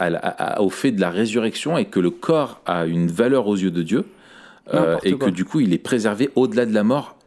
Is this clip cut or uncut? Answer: uncut